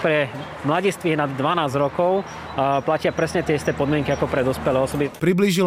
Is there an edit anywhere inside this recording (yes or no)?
no